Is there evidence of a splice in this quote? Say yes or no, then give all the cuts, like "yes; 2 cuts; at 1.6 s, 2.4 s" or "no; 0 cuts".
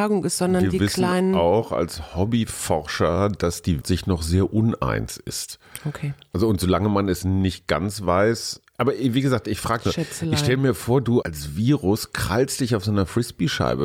yes; 2 cuts; at 3.8 s, 11.2 s